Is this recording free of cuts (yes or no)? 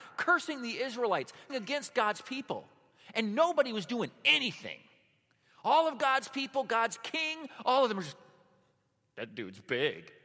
no